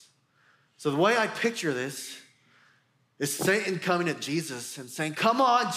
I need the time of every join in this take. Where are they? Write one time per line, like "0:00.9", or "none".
none